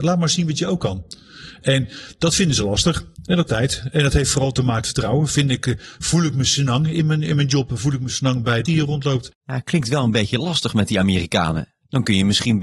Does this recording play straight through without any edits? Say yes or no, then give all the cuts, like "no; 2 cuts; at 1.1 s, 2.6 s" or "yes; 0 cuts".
no; 4 cuts; at 3.1 s, 3.5 s, 4.8 s, 8.7 s